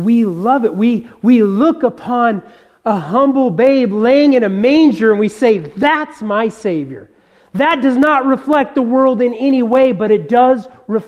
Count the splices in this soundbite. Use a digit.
0